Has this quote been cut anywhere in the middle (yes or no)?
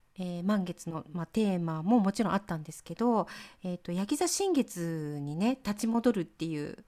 no